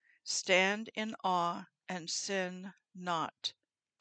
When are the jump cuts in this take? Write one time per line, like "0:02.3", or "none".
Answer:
none